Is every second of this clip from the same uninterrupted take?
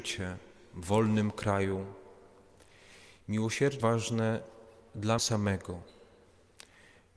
no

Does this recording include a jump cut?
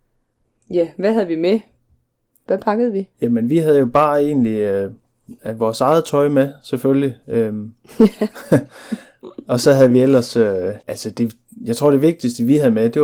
yes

